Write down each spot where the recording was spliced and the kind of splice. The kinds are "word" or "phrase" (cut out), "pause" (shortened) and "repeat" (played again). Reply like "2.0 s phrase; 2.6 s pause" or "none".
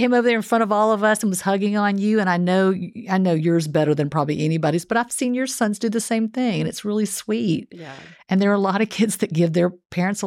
none